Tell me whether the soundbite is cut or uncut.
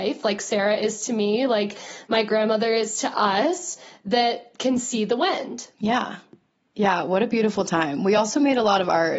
uncut